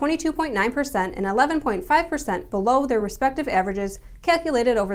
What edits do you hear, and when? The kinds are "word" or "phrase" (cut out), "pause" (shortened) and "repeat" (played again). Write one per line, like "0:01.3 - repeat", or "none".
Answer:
none